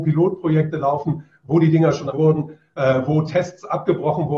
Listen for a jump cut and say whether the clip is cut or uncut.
cut